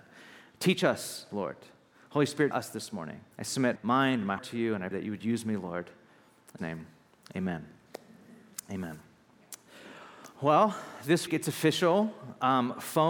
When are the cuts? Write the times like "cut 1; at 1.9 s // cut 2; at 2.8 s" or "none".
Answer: cut 1; at 2.5 s // cut 2; at 3.3 s // cut 3; at 3.8 s // cut 4; at 4.4 s // cut 5; at 4.9 s // cut 6; at 6.6 s // cut 7; at 10.3 s // cut 8; at 11.3 s